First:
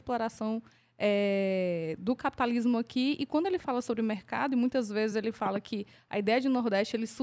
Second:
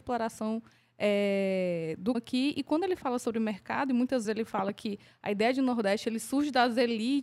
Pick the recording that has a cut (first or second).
second